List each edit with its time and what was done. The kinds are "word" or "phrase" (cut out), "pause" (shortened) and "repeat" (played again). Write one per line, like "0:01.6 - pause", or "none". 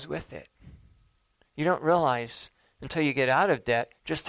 none